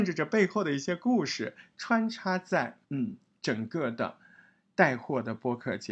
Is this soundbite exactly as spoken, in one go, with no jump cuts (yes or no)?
no